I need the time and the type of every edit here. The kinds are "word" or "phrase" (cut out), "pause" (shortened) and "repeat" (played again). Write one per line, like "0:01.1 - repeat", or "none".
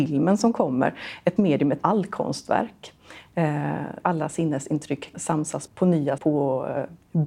0:01.4 - word
0:01.8 - word
0:04.0 - word
0:05.1 - word
0:05.7 - word
0:06.2 - word